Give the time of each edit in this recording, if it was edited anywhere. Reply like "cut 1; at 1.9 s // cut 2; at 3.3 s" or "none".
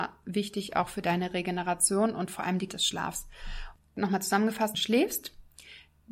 cut 1; at 2.7 s // cut 2; at 4.7 s